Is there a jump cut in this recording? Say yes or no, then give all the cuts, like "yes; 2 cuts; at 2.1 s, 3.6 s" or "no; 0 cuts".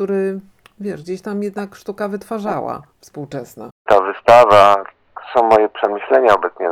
no; 0 cuts